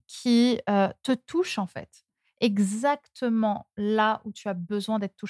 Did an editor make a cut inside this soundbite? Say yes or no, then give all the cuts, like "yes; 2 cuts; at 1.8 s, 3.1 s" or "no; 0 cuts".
no; 0 cuts